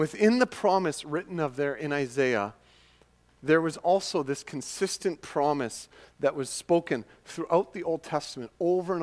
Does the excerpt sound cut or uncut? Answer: uncut